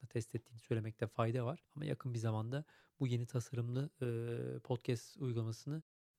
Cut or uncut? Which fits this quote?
uncut